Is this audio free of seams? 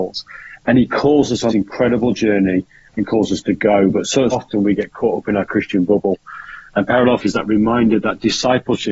no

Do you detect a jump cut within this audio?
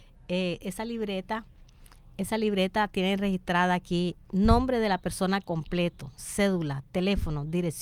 no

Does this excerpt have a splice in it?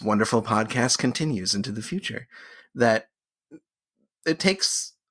no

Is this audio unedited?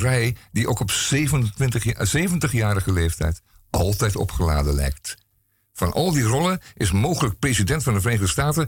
yes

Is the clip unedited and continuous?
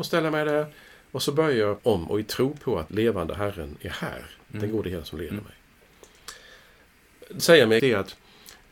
no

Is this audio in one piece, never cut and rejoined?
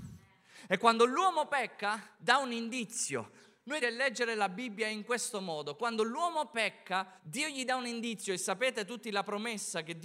no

